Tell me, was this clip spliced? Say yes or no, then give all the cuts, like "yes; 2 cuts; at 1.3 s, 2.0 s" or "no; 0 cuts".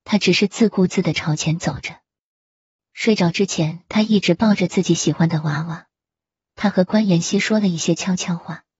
no; 0 cuts